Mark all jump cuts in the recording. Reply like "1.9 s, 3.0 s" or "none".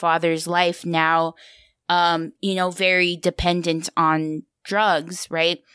none